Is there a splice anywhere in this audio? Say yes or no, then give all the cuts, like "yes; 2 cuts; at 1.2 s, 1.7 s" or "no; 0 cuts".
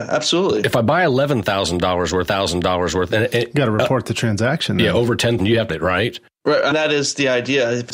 yes; 4 cuts; at 2.3 s, 5.4 s, 5.7 s, 6.7 s